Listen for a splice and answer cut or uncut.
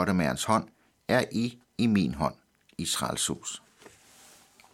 uncut